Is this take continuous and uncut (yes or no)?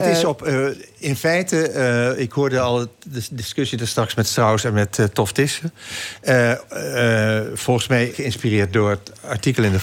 no